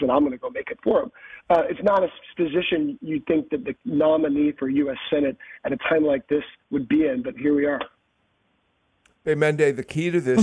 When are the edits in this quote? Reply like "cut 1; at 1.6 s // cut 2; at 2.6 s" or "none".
none

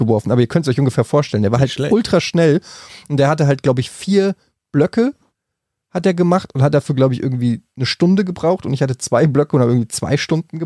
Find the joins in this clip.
none

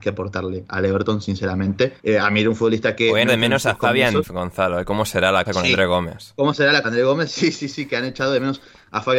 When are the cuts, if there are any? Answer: cut 1; at 2.0 s // cut 2; at 3.3 s // cut 3; at 4.2 s // cut 4; at 5.5 s // cut 5; at 6.8 s

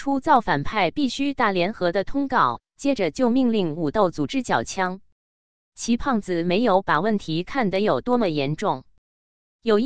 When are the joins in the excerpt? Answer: none

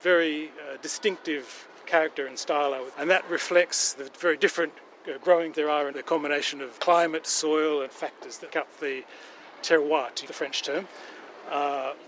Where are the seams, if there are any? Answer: cut 1; at 2.9 s // cut 2; at 4.0 s // cut 3; at 5.5 s // cut 4; at 5.9 s // cut 5; at 6.8 s // cut 6; at 7.9 s // cut 7; at 8.5 s // cut 8; at 10.3 s

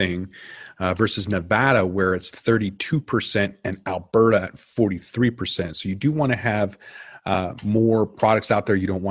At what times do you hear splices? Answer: none

